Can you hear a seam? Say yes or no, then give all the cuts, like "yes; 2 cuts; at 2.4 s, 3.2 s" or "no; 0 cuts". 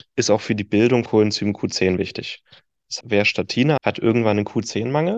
yes; 3 cuts; at 1.1 s, 3.0 s, 3.8 s